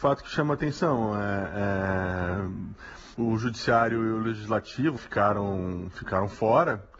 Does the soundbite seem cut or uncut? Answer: cut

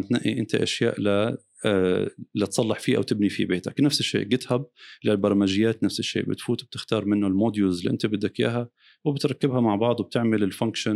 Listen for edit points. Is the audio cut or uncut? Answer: uncut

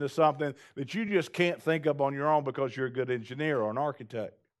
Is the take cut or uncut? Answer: uncut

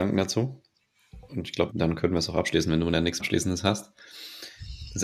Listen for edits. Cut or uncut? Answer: cut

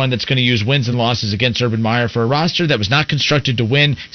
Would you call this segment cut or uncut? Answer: uncut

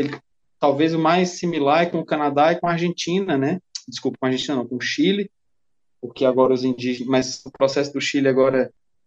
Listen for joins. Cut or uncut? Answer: uncut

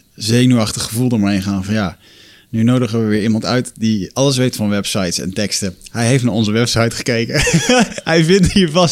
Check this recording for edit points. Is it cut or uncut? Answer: uncut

